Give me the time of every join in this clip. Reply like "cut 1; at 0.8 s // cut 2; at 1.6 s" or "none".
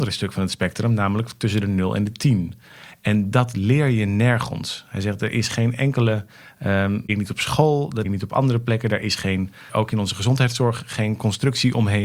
cut 1; at 7.1 s // cut 2; at 8.0 s // cut 3; at 9.7 s